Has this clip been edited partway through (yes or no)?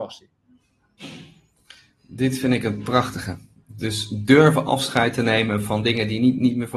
no